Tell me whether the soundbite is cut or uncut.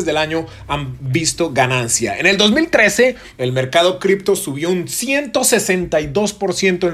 uncut